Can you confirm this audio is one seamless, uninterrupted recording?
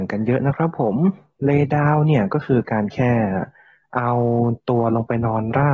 yes; 0 cuts

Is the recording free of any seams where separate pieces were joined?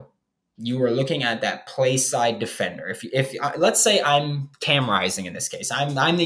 no; 1 cut; at 4.5 s

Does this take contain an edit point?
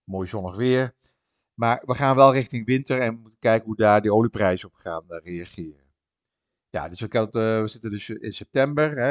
no; 0 cuts

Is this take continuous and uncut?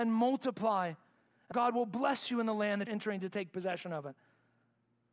no; 2 cuts; at 1.5 s, 2.9 s

